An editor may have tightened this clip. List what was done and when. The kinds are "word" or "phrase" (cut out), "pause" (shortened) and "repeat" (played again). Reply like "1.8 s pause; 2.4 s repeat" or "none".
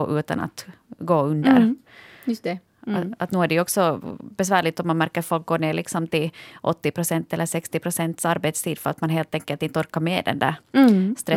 none